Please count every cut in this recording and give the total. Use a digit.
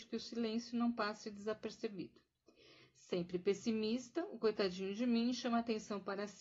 0